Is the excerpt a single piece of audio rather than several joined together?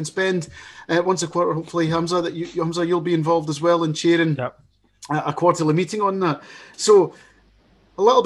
yes; 0 cuts

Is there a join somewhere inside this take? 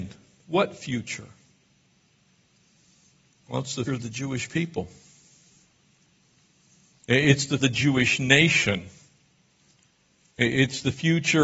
yes; 2 cuts; at 3.9 s, 7.6 s

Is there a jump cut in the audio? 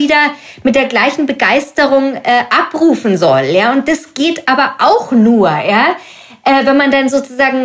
no; 0 cuts

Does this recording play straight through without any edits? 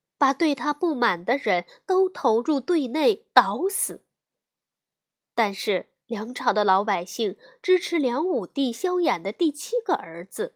yes; 0 cuts

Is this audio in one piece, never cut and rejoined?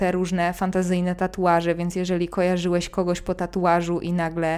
yes; 0 cuts

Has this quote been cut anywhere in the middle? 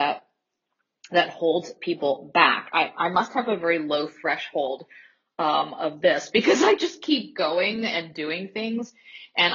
no; 0 cuts

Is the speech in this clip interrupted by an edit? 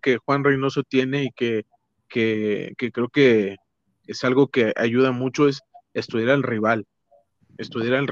no; 0 cuts

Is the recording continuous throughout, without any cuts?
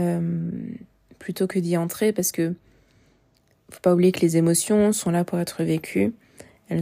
yes; 0 cuts

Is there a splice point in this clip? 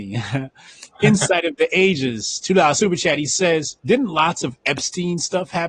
yes; 1 cut; at 3.8 s

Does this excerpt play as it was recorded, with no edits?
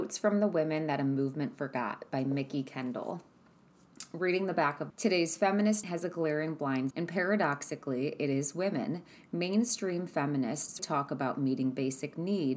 no; 4 cuts; at 4.9 s, 5.8 s, 6.9 s, 10.8 s

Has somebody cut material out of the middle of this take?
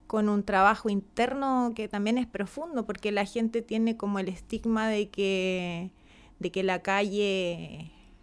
no; 0 cuts

